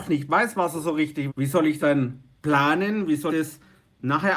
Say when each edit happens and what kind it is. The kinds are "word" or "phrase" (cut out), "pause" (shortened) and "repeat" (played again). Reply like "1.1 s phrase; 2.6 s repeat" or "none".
1.3 s word; 1.8 s word; 3.3 s word